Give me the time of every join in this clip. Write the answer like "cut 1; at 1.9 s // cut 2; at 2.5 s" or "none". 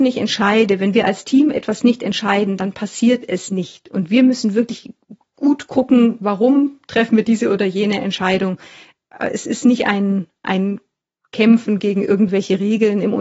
none